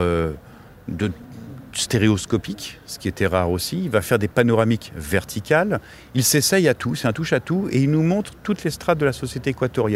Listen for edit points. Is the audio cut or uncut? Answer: uncut